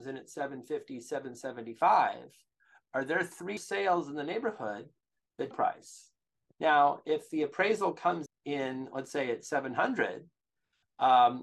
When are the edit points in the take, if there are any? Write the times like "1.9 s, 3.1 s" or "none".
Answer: 3.6 s, 5.5 s, 8.3 s